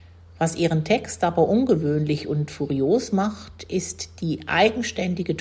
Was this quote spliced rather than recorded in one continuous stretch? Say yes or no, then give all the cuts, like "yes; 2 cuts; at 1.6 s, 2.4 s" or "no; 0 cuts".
no; 0 cuts